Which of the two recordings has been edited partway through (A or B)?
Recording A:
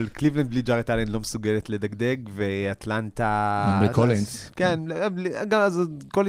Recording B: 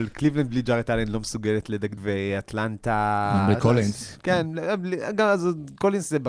B